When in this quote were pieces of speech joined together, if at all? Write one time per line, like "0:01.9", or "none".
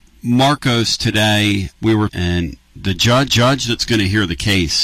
0:01.7
0:02.1
0:02.6
0:03.3